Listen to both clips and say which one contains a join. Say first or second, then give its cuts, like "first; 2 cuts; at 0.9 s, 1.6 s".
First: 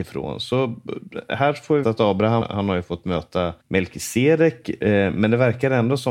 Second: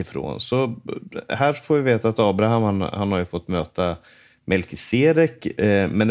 first; 3 cuts; at 1.8 s, 2.4 s, 3.6 s